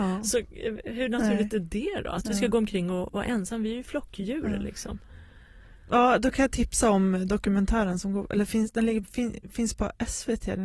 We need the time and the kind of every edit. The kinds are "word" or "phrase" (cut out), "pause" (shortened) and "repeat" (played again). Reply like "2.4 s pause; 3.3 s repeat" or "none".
none